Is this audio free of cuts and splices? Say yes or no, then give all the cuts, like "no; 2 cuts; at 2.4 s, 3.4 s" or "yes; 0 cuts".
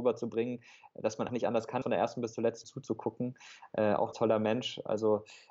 no; 4 cuts; at 1.3 s, 1.8 s, 2.6 s, 4.1 s